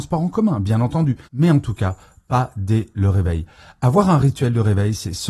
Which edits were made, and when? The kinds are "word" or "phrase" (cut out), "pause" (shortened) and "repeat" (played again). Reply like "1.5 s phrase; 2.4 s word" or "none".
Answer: 1.2 s pause